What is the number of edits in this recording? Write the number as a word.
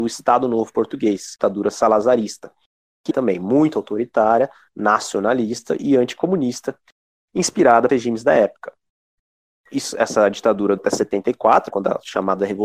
five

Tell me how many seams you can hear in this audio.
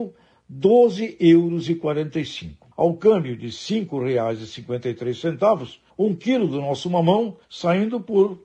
three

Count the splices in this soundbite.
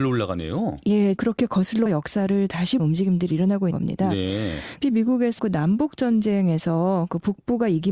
six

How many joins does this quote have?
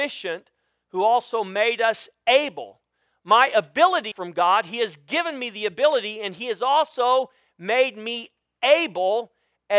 one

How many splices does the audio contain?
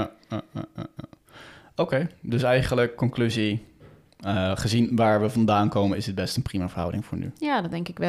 zero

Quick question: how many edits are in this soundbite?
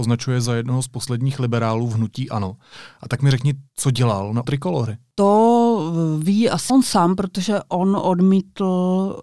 three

